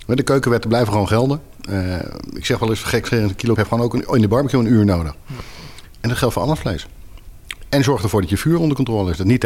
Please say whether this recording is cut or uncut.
cut